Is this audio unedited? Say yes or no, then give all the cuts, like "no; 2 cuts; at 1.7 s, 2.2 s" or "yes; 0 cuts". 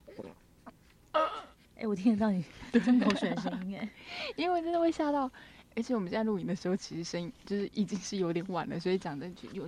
yes; 0 cuts